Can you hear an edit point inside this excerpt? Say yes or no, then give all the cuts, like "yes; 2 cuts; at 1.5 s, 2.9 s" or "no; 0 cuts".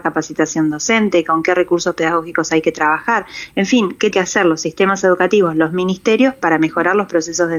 yes; 1 cut; at 4.1 s